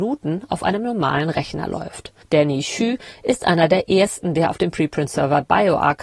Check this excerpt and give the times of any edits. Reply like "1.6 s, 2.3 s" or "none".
2.2 s